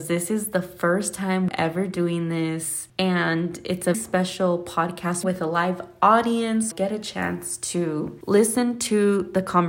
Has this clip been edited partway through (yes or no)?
yes